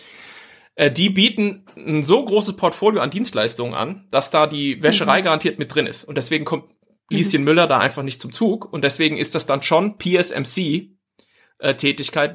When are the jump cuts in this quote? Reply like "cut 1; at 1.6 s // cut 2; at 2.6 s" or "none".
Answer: none